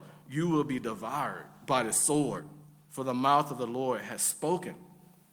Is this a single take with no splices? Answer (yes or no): yes